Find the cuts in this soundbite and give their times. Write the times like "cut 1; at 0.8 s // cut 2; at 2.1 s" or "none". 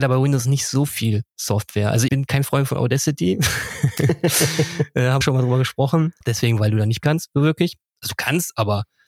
cut 1; at 2.1 s // cut 2; at 5.2 s // cut 3; at 6.2 s // cut 4; at 7.0 s

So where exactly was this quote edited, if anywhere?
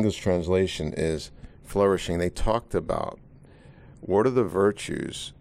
none

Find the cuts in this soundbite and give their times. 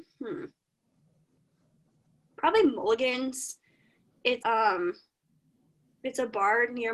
cut 1; at 4.4 s

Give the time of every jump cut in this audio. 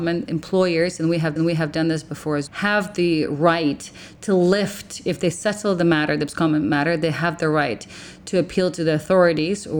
cut 1; at 1.4 s // cut 2; at 2.5 s

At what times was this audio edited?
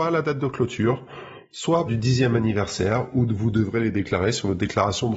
cut 1; at 1.9 s

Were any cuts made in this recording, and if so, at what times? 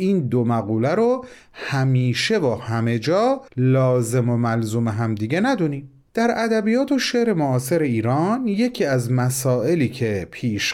cut 1; at 3.5 s // cut 2; at 6.1 s

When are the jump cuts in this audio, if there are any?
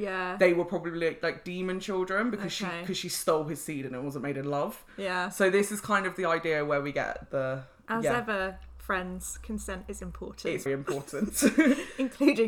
cut 1; at 7.3 s // cut 2; at 10.7 s

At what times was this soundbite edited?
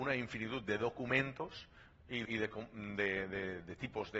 cut 1; at 2.3 s

